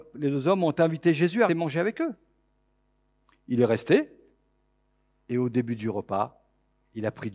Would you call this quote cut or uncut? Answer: cut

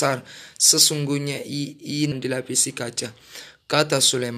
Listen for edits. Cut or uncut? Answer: cut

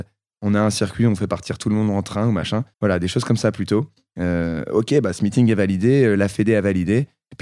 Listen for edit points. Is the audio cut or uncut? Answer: cut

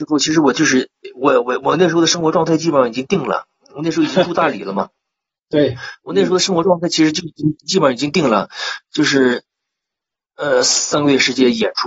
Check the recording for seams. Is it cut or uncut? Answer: uncut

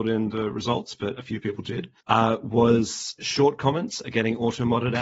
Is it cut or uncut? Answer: cut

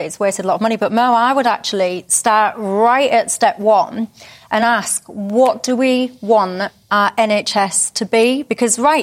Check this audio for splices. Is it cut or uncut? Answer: uncut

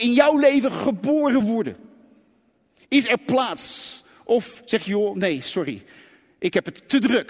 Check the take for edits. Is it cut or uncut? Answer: uncut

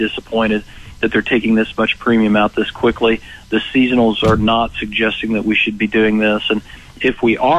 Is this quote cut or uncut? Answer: uncut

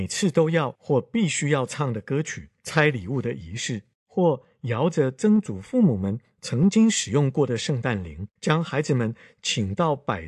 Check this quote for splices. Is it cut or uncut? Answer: cut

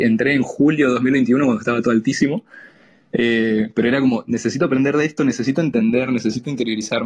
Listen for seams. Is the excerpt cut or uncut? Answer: uncut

